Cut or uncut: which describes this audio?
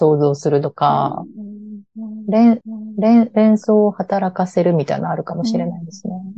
cut